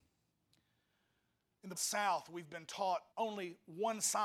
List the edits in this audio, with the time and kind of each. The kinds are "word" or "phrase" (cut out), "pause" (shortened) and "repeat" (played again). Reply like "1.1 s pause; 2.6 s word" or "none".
1.7 s phrase; 3.1 s pause